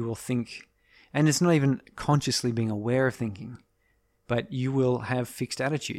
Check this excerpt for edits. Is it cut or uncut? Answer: uncut